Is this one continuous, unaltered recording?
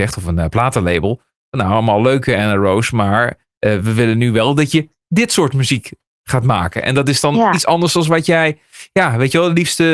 yes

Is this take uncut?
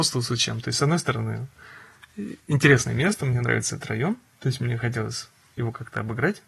yes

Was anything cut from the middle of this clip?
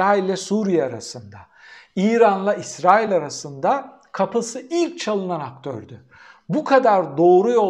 no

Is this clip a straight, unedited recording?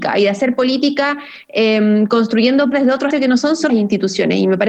no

